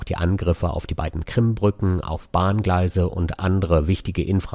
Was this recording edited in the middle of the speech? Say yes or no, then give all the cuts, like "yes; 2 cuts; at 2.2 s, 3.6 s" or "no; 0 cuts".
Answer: no; 0 cuts